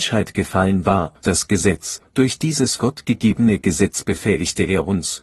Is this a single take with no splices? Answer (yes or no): no